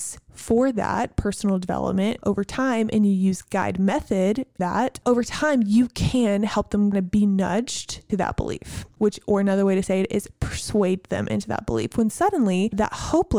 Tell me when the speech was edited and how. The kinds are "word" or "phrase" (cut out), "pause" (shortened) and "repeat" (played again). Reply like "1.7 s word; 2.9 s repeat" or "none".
4.6 s word; 6.9 s word; 8.1 s word